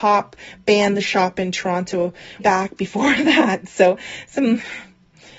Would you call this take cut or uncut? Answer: cut